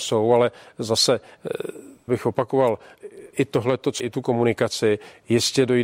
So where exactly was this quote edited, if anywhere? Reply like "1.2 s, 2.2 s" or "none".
2.1 s, 3.3 s, 4.0 s